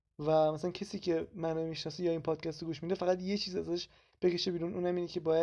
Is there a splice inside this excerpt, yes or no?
no